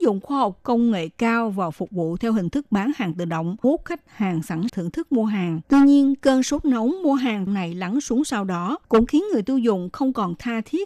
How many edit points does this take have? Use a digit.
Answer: 5